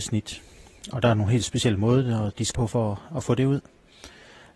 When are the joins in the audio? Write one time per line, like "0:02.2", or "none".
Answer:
0:02.5